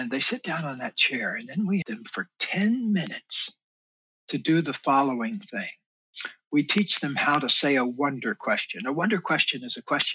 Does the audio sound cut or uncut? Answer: cut